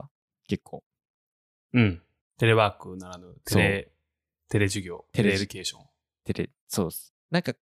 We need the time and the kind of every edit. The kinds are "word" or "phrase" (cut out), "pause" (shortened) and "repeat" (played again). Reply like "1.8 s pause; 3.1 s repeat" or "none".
none